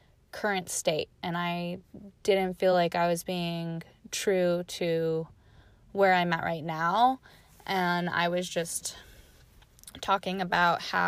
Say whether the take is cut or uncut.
uncut